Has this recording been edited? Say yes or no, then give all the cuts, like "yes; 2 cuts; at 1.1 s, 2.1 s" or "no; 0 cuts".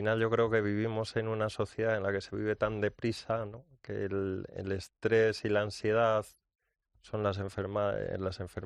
no; 0 cuts